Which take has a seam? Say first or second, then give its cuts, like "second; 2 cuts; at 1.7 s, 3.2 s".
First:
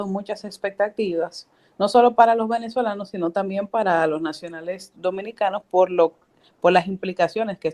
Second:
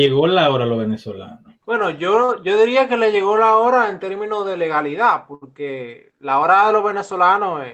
second; 1 cut; at 1.6 s